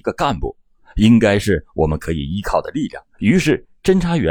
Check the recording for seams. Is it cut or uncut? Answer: cut